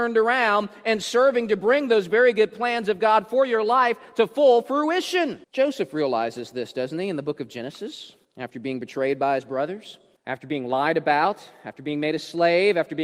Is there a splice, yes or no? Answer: yes